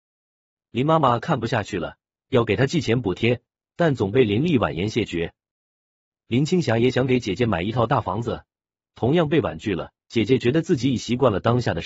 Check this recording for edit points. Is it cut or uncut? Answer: cut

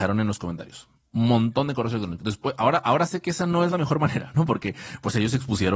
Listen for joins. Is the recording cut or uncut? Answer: uncut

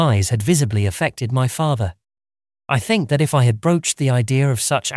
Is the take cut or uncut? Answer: uncut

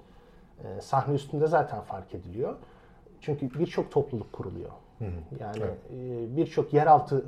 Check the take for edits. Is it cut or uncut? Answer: uncut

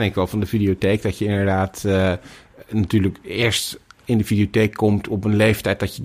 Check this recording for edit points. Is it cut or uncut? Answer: uncut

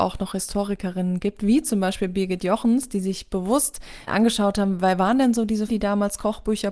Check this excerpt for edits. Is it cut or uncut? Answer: cut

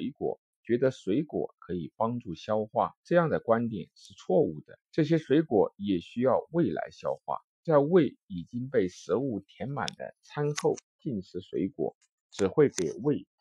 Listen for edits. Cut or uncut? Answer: cut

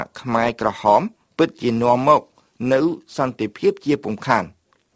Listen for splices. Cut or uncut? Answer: uncut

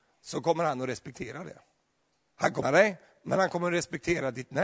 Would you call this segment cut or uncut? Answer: cut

